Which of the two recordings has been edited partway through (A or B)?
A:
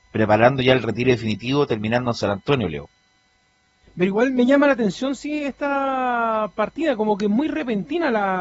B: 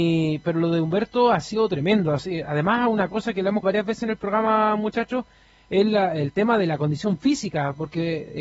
B